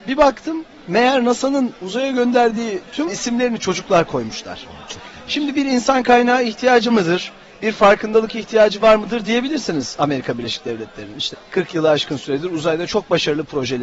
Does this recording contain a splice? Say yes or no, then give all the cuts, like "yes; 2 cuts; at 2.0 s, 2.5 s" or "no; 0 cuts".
yes; 3 cuts; at 3.1 s, 6.9 s, 11.3 s